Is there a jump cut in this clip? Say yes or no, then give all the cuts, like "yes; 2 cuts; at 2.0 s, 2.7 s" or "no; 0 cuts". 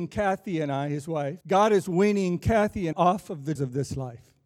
yes; 3 cuts; at 1.4 s, 2.9 s, 3.6 s